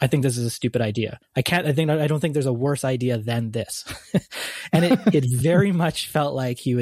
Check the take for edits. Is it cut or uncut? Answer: uncut